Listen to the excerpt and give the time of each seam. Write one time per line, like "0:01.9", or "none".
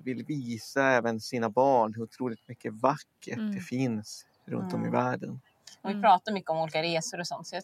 none